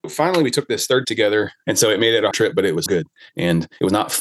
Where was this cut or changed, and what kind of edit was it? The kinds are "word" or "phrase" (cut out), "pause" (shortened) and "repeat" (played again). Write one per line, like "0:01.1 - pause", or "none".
0:01.0 - word
0:02.3 - word
0:02.9 - word